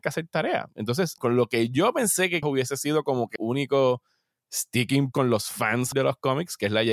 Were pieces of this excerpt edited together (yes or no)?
yes